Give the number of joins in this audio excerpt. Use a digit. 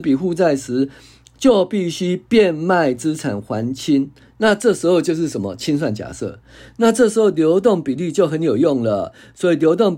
0